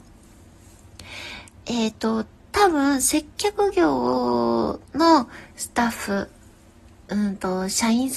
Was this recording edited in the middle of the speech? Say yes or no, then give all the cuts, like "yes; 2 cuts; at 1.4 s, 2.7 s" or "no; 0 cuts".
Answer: no; 0 cuts